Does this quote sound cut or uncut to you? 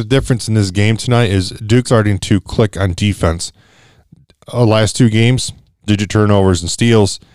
cut